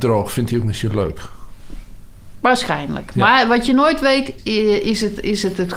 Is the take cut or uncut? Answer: cut